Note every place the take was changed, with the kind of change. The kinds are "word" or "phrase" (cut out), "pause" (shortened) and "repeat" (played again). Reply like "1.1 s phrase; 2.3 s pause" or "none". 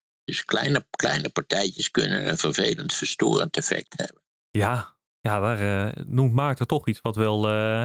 none